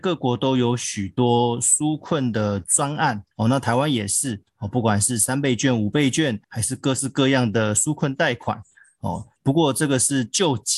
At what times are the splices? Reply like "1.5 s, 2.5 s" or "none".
3.3 s, 6.4 s, 9.4 s